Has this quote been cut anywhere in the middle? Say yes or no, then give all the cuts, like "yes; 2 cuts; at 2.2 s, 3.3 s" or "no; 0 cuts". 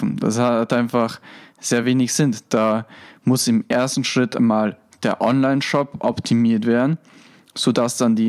no; 0 cuts